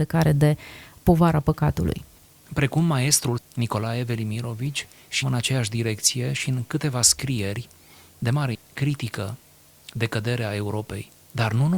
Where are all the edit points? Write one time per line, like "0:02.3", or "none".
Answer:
0:03.4
0:05.2
0:08.5